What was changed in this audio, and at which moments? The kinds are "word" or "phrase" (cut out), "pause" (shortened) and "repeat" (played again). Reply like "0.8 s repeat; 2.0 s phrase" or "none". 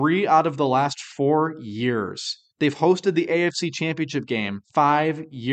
2.5 s pause; 4.6 s pause